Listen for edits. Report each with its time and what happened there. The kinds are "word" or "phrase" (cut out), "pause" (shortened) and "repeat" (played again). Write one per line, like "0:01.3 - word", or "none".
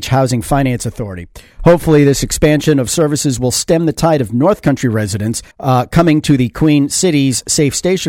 0:05.5 - pause

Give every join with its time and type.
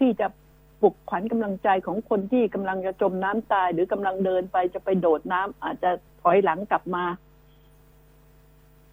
0:06.1 - pause

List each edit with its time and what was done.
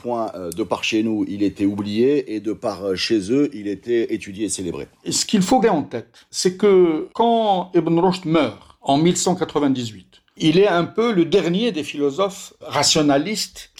0:05.6 - word

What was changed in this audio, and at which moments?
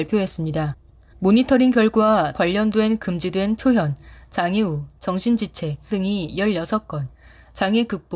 0:02.3 - word
0:05.9 - word

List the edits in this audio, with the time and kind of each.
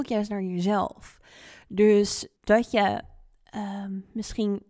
0:02.4 - pause

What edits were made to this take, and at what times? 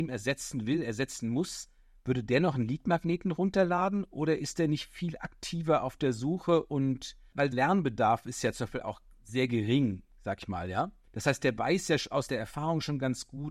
0:07.5 - word
0:11.1 - pause

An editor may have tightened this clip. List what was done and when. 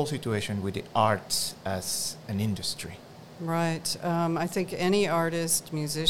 none

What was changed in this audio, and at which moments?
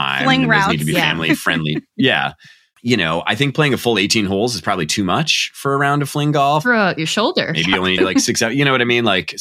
0:08.0 - phrase

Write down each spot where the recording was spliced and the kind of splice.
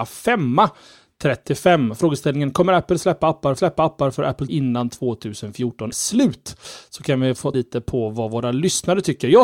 0:03.6 - repeat
0:04.5 - word
0:05.9 - word
0:07.5 - phrase

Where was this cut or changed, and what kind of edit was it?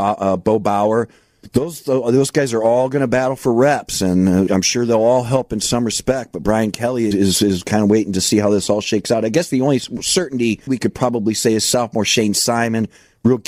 0:04.5 - word
0:07.1 - word
0:10.7 - word

